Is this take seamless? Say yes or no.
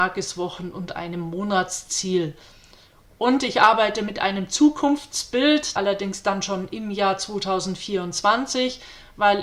no